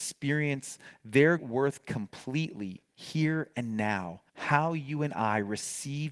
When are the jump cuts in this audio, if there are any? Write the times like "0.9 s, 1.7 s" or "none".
1.4 s, 4.3 s